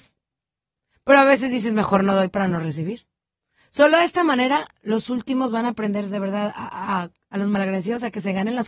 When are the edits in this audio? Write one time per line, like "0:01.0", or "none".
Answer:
none